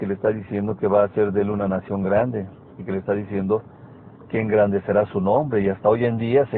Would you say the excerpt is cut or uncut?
uncut